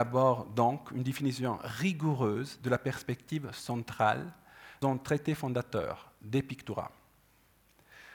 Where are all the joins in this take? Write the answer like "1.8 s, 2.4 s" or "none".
4.8 s